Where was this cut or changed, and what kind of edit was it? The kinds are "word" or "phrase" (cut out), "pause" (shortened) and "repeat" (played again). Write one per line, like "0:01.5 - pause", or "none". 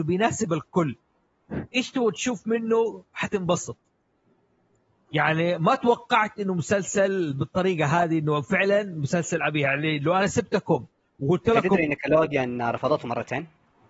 none